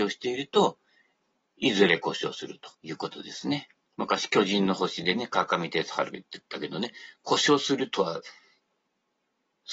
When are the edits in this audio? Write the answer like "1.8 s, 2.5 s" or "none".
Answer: 2.7 s, 3.8 s, 6.5 s

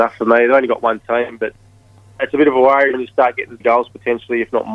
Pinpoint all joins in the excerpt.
2.2 s, 2.9 s, 3.6 s

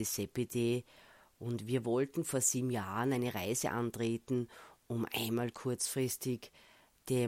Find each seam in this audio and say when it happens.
none

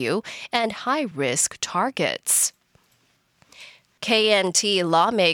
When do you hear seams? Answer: none

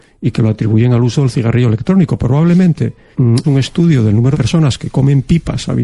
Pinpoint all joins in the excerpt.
3.1 s, 3.4 s, 4.3 s

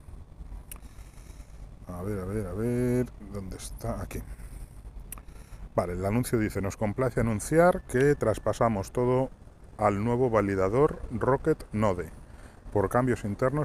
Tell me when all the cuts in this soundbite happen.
none

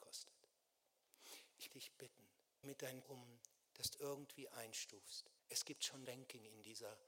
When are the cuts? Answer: 1.7 s, 2.6 s, 3.0 s, 3.9 s, 5.4 s, 6.1 s

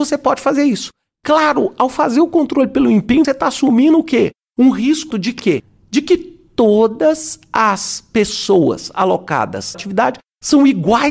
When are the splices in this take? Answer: 3.2 s, 5.1 s, 9.7 s

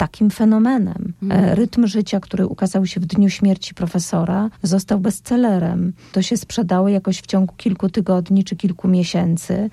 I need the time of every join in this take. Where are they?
1.2 s, 4.5 s

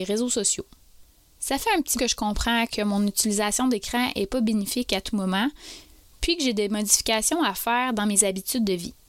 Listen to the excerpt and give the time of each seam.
2.0 s

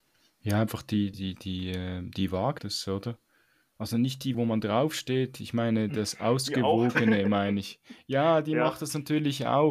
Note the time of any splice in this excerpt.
1.1 s, 2.6 s, 4.3 s

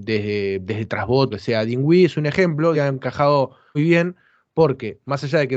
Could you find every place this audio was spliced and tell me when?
1.3 s, 2.7 s, 3.7 s

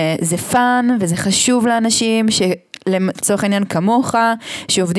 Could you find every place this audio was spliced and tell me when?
none

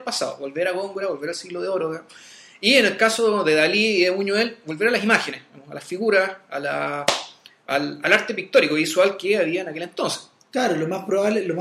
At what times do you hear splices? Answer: 8.0 s

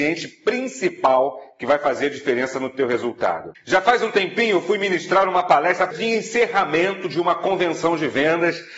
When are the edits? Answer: 5.9 s

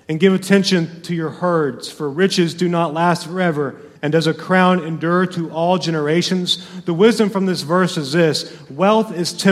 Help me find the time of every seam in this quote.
4.0 s

